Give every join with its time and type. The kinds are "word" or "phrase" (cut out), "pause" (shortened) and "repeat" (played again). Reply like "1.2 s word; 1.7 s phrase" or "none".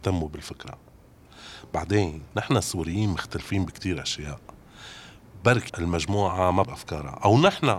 5.7 s word; 6.6 s word